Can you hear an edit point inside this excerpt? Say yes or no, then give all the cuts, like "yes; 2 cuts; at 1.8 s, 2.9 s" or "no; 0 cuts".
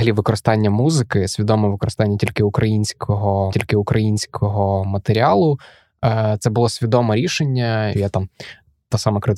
yes; 2 cuts; at 3.5 s, 7.9 s